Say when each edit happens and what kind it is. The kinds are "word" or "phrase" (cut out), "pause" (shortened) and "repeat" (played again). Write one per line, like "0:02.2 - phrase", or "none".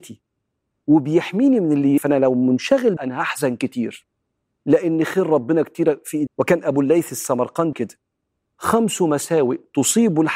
0:02.0 - word
0:03.0 - word
0:06.3 - word
0:07.7 - word